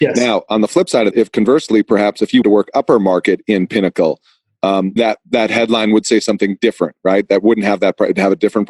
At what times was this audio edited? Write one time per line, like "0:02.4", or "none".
0:01.1
0:02.4
0:05.0